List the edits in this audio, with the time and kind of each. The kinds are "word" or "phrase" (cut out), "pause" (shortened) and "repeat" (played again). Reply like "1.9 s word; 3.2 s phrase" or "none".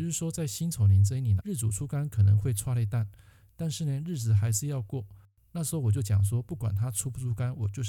1.4 s word